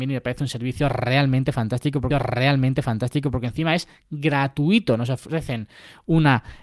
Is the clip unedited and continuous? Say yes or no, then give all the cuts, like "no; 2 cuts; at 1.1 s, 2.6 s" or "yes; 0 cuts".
no; 1 cut; at 2.1 s